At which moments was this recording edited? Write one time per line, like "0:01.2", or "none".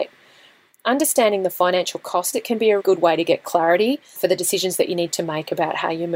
0:02.3
0:02.8
0:04.2